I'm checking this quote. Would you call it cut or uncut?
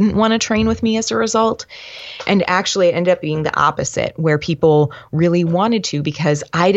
uncut